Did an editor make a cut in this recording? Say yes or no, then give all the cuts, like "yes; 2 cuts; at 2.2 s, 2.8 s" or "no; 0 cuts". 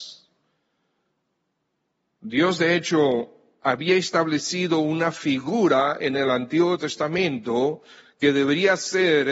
no; 0 cuts